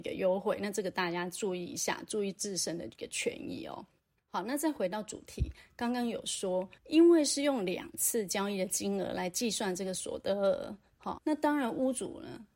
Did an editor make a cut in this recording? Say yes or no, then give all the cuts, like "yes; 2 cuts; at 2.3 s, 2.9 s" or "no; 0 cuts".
yes; 3 cuts; at 4.0 s, 6.8 s, 11.2 s